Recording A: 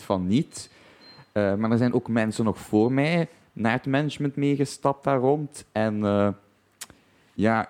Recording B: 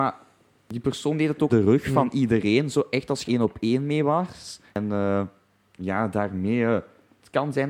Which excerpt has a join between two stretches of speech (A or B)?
B